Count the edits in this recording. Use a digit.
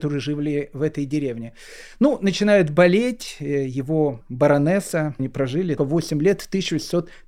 3